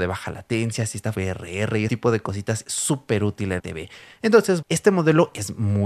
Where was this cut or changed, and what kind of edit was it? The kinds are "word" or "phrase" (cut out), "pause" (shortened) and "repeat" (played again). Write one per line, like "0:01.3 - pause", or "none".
0:01.1 - word
0:01.9 - word
0:02.6 - word
0:03.6 - word
0:04.6 - word